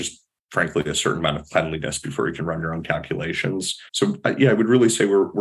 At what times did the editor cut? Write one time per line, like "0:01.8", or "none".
0:03.9